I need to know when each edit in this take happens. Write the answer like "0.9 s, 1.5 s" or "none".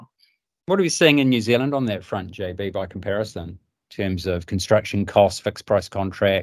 none